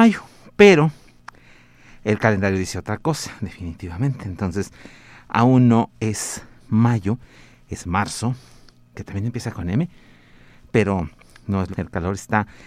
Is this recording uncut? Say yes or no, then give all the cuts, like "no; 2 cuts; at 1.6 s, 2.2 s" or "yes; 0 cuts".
no; 1 cut; at 11.7 s